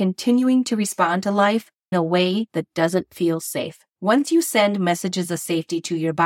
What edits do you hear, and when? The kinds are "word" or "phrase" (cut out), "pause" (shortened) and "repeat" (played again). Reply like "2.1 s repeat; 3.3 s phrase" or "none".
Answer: 1.9 s word; 3.9 s pause